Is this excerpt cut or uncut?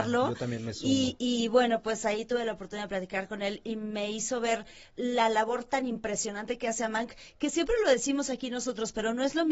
uncut